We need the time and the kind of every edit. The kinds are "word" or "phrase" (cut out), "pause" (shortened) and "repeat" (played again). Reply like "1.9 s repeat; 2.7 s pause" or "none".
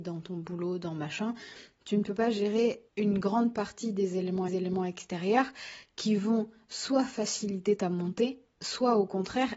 2.9 s pause; 4.5 s repeat